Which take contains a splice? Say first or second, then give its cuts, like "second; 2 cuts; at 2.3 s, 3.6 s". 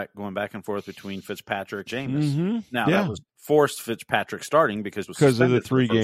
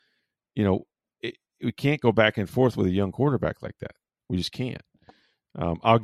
first; 3 cuts; at 1.9 s, 3.3 s, 5.1 s